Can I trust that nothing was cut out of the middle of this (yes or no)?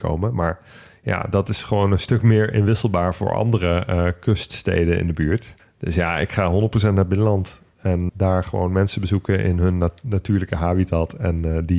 no